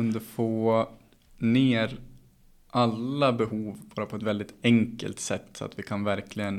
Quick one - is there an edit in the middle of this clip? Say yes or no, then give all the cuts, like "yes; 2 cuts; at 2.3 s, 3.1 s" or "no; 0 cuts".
yes; 1 cut; at 4.2 s